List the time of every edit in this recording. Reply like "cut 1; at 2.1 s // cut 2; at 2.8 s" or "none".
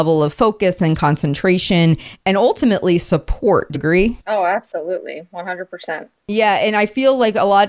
cut 1; at 3.7 s // cut 2; at 4.2 s